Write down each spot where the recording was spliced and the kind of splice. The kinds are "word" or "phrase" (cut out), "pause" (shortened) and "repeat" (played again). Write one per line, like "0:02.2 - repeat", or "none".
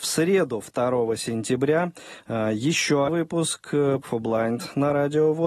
0:03.1 - word
0:04.0 - phrase